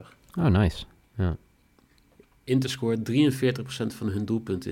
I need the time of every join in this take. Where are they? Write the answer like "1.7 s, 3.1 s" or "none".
none